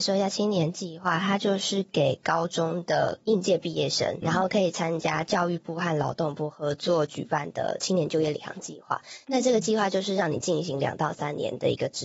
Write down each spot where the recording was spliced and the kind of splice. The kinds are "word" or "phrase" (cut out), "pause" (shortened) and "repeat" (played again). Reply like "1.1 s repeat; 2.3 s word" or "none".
4.2 s word